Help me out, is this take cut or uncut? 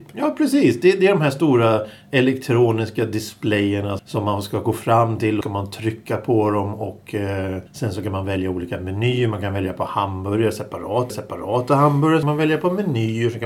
cut